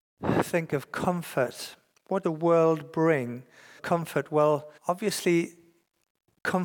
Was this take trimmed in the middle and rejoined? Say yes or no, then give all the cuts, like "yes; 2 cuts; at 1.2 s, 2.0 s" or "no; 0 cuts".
yes; 3 cuts; at 2.2 s, 3.8 s, 4.8 s